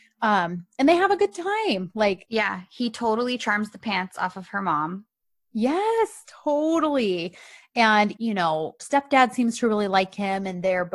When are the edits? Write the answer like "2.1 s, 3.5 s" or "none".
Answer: 8.2 s, 8.8 s